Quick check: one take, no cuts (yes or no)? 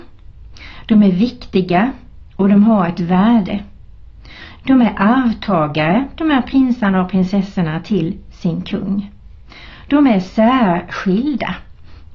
yes